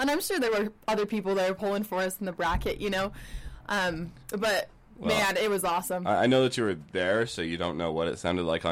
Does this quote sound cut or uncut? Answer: cut